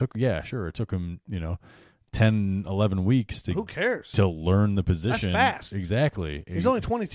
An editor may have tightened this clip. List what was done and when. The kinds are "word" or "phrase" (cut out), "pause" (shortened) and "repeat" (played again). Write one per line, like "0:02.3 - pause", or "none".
none

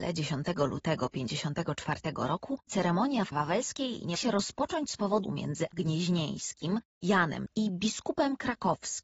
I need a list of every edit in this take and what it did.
0:02.7 - word
0:03.3 - word
0:04.1 - word
0:05.2 - word
0:05.7 - word
0:07.5 - word

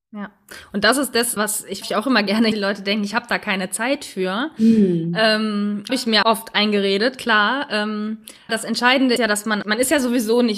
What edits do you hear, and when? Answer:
0:01.4 - word
0:01.8 - word
0:02.5 - word
0:05.9 - word
0:06.2 - word
0:08.5 - word
0:09.2 - word
0:09.6 - word

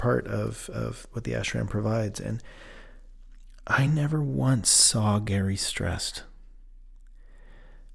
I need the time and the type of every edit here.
none

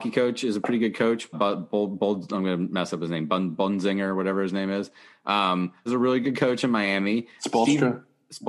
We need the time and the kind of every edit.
0:01.3 - word
0:05.9 - word

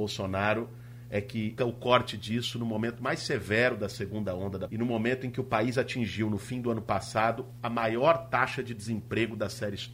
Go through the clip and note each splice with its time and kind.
0:01.6 - word
0:04.7 - word

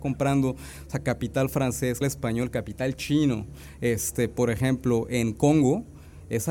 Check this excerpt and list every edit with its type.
0:02.0 - word

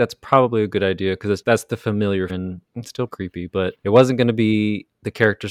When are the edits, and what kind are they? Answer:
0:01.4 - word
0:02.3 - word
0:02.7 - pause
0:03.1 - word
0:03.8 - pause

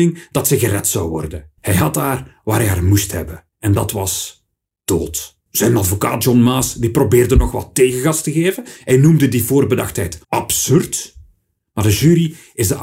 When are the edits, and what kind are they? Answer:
0:01.6 - pause
0:03.5 - pause
0:05.5 - pause
0:10.2 - pause

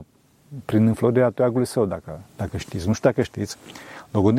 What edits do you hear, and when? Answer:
0:02.3 - pause

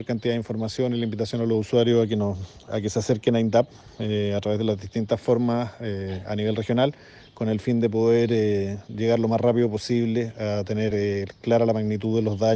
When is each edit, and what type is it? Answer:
none

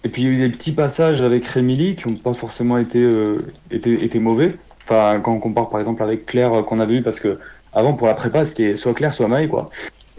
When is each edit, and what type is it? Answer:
0:01.2 - phrase

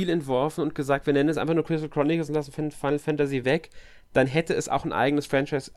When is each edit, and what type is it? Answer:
none

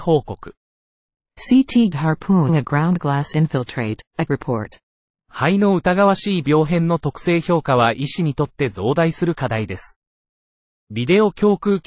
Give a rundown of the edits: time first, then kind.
0:01.9 - word
0:02.5 - word
0:04.3 - word

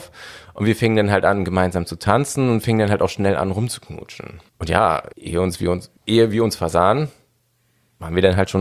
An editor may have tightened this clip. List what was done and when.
0:04.5 - pause
0:05.1 - pause
0:06.0 - pause

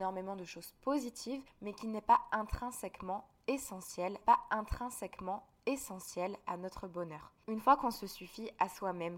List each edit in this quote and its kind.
0:04.2 - repeat

